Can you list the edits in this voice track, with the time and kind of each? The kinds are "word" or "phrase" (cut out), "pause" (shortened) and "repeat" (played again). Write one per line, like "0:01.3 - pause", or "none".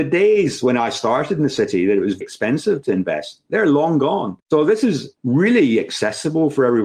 0:02.2 - word
0:04.4 - pause

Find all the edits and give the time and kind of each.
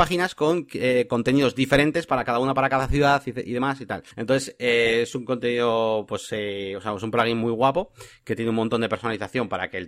0:04.1 - pause

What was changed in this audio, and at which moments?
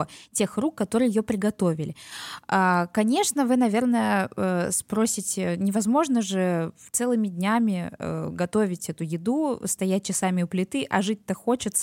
none

